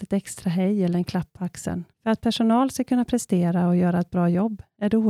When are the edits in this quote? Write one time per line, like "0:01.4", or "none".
0:01.9

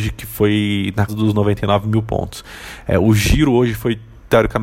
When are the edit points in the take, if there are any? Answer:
0:01.1

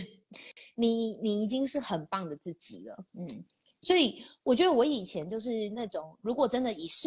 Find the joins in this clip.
0:03.1
0:04.4

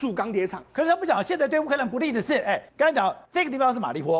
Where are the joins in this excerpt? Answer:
0:02.7
0:03.3

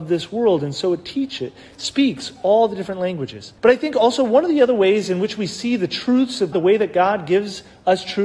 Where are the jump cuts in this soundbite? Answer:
0:03.6
0:06.5

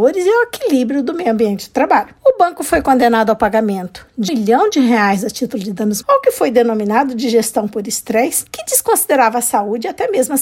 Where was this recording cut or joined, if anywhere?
0:02.2
0:04.3
0:06.0

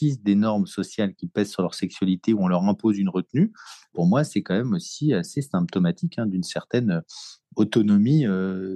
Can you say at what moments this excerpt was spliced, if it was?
none

